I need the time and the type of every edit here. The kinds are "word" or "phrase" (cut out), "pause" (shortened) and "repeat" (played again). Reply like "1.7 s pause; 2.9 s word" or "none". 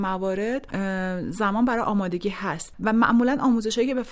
none